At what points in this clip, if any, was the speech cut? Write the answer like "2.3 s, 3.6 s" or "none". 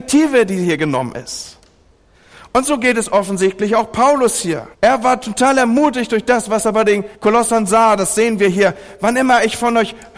4.7 s, 7.1 s